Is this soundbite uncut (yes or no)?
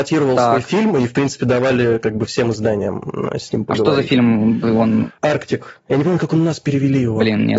yes